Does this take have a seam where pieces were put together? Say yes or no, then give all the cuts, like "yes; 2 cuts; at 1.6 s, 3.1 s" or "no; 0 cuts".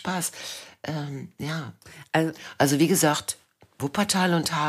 no; 0 cuts